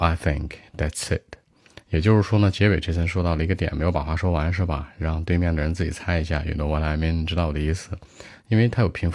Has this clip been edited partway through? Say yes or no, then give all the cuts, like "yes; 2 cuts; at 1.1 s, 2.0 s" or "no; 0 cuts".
no; 0 cuts